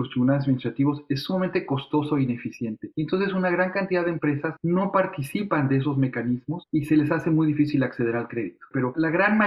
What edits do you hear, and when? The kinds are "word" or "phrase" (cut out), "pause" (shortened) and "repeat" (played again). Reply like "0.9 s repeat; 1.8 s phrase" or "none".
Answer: none